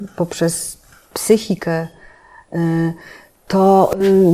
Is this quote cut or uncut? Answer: uncut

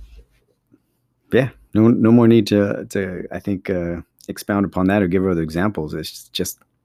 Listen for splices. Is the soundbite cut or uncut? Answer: uncut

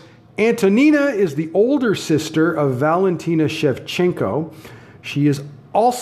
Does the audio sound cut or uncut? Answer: uncut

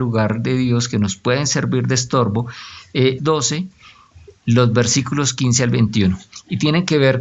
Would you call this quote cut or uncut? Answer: cut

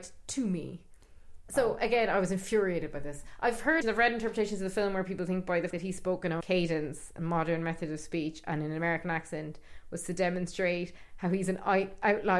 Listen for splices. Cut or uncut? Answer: cut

